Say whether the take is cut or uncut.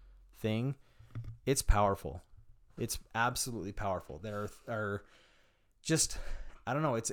uncut